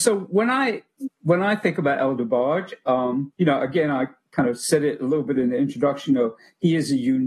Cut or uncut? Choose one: cut